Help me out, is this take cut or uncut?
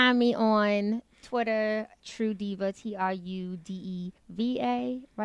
cut